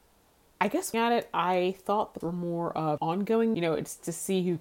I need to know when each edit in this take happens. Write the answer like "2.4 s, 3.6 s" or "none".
0.9 s, 2.2 s, 3.0 s, 3.5 s